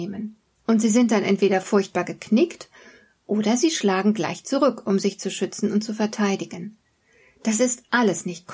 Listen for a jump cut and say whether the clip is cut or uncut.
uncut